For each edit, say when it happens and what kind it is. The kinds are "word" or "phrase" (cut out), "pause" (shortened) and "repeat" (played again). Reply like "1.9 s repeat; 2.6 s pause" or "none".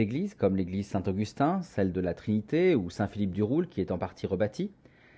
none